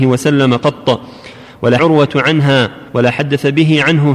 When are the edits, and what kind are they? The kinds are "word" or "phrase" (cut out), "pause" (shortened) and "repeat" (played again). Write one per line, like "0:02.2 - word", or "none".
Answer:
0:01.8 - phrase
0:02.9 - pause